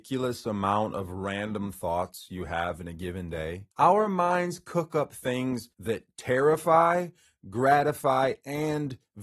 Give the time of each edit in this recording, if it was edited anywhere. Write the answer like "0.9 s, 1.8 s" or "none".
3.7 s, 5.7 s